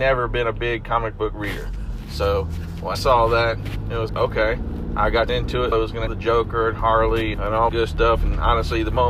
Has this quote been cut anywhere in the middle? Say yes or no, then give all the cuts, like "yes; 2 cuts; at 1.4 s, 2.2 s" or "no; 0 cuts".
yes; 7 cuts; at 2.9 s, 4.1 s, 5.3 s, 5.7 s, 6.1 s, 7.3 s, 7.7 s